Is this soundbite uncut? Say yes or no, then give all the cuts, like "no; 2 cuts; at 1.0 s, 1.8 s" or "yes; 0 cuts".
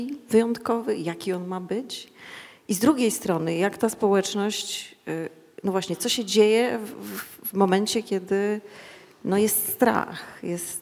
yes; 0 cuts